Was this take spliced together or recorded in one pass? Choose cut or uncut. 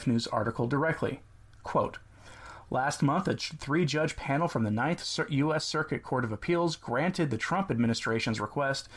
uncut